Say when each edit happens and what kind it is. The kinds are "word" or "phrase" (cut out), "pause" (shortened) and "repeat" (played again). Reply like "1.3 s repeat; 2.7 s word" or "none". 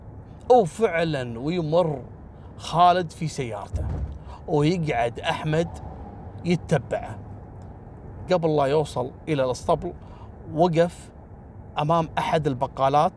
8.3 s word